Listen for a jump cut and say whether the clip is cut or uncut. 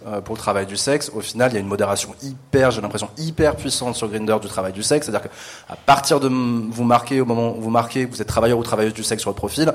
uncut